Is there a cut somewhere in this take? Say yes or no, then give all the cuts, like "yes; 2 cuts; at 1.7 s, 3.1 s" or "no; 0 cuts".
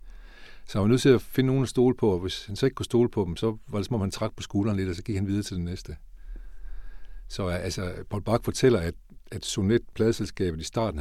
no; 0 cuts